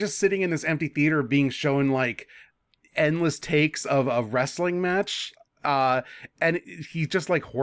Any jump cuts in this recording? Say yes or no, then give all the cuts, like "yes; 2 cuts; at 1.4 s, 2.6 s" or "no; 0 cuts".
no; 0 cuts